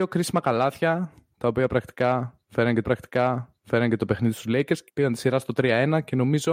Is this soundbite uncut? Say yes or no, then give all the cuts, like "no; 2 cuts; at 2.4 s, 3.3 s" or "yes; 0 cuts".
no; 2 cuts; at 2.8 s, 4.9 s